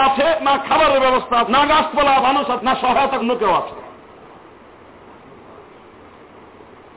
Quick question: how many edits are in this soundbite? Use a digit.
4